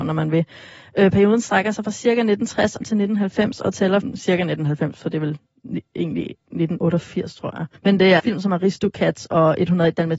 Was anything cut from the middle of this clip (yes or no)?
yes